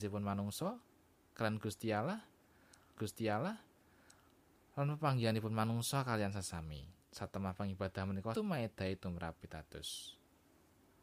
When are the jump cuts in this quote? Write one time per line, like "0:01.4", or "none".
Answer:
0:03.0
0:07.0
0:08.3
0:09.4